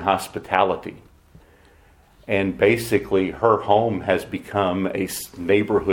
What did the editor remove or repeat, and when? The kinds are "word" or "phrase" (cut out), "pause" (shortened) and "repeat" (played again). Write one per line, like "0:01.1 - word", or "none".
none